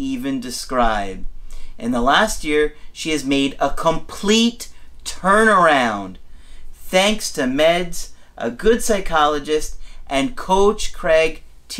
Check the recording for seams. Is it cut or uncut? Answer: uncut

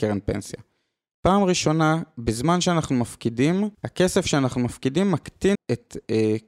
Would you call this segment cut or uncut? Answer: cut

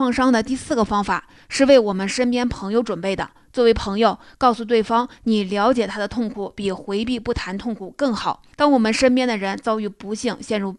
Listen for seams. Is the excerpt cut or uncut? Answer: cut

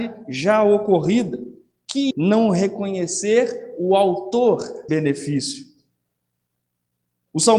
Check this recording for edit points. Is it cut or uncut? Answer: cut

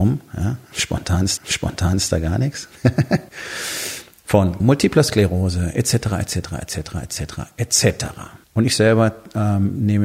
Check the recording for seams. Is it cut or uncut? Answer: cut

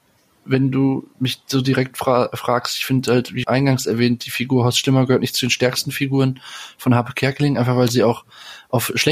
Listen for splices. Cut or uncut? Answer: cut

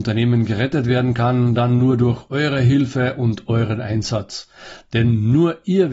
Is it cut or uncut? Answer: uncut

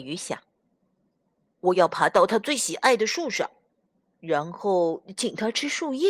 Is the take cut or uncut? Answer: uncut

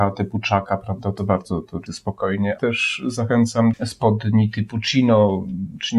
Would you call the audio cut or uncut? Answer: cut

